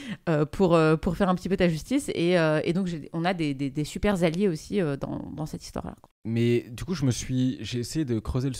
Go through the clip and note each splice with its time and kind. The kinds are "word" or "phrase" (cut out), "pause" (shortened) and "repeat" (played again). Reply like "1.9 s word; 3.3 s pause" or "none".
6.1 s pause